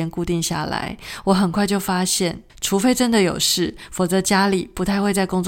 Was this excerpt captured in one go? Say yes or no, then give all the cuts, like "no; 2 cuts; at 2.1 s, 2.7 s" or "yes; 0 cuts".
no; 1 cut; at 2.5 s